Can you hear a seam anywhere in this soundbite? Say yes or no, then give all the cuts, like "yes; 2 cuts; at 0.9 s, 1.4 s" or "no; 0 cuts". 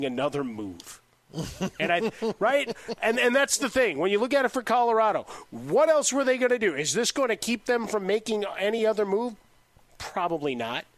no; 0 cuts